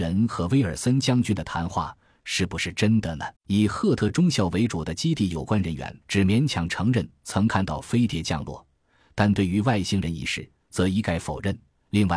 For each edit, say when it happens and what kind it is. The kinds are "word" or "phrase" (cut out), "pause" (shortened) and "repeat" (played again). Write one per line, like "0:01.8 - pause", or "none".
0:03.4 - pause
0:06.0 - pause